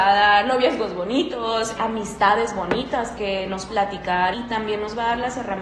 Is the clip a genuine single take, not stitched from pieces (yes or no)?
no